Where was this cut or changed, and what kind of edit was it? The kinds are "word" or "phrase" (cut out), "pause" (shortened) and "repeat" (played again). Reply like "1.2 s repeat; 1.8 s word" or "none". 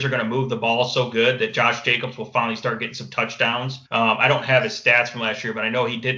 3.9 s pause